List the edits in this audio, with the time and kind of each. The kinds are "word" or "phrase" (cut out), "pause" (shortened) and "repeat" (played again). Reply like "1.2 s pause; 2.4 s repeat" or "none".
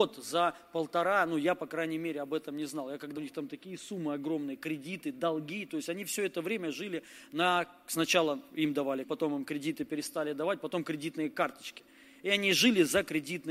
3.2 s word; 9.0 s word